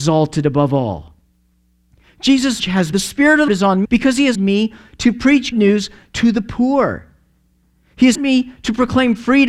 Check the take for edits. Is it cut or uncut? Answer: cut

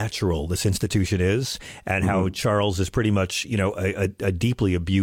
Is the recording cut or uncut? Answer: uncut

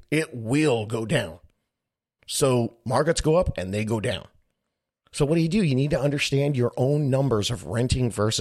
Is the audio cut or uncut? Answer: uncut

